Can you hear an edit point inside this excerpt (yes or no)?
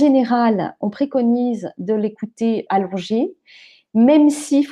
yes